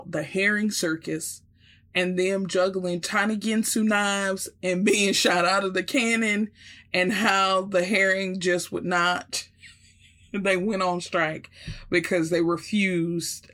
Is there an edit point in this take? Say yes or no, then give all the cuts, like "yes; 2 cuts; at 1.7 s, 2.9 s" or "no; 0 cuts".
no; 0 cuts